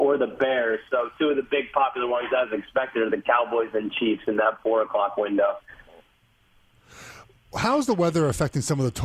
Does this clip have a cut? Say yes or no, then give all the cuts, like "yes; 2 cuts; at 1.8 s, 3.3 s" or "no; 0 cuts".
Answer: no; 0 cuts